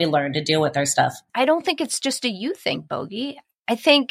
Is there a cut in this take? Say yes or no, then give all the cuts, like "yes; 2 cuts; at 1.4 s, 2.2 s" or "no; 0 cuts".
no; 0 cuts